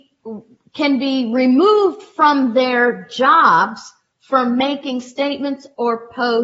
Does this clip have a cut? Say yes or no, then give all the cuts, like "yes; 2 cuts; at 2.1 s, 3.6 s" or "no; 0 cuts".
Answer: no; 0 cuts